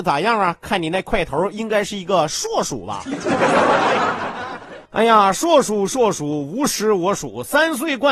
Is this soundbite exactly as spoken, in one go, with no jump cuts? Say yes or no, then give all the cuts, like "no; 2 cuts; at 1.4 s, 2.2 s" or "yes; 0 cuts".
no; 1 cut; at 4.9 s